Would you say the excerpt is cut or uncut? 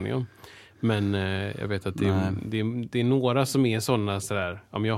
uncut